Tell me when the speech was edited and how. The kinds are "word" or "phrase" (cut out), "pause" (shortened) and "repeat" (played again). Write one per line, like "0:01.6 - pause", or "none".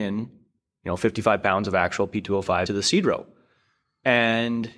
0:02.7 - word